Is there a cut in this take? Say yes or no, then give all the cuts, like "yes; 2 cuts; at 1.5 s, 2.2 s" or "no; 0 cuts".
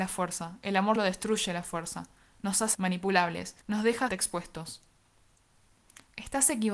yes; 4 cuts; at 1.0 s, 2.7 s, 3.6 s, 4.1 s